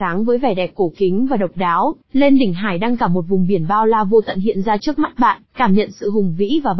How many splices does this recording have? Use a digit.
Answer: 2